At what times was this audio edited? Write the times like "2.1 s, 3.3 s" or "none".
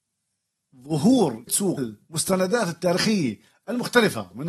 1.5 s, 1.8 s